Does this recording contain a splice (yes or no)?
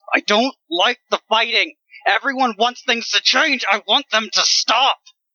no